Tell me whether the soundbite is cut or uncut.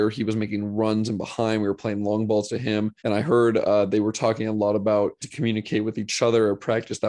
cut